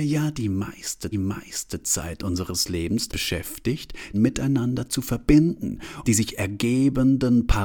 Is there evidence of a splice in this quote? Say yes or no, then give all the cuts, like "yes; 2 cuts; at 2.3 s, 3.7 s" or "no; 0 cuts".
yes; 4 cuts; at 1.1 s, 3.1 s, 4.1 s, 6.0 s